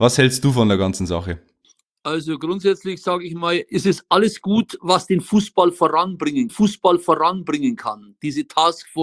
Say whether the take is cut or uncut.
cut